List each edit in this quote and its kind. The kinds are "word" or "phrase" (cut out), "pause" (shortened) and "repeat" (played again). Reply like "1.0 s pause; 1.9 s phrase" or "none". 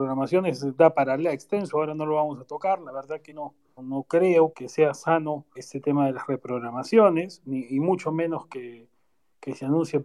3.3 s word; 3.8 s word; 4.5 s word; 5.6 s word